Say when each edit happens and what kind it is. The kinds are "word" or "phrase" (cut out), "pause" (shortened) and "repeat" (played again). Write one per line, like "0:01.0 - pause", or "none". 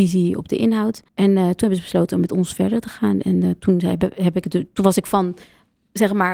0:01.1 - pause